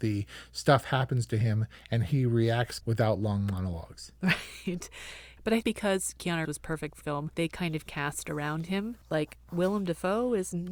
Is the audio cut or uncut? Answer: cut